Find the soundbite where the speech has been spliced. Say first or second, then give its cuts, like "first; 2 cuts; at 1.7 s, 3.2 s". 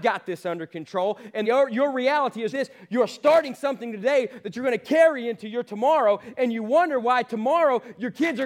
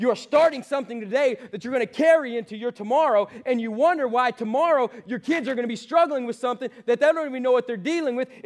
first; 2 cuts; at 1.4 s, 2.5 s